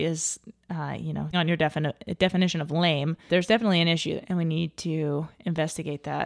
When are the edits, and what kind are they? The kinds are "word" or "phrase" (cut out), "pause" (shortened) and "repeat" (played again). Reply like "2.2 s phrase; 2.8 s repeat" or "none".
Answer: 1.3 s word; 3.3 s word; 4.2 s word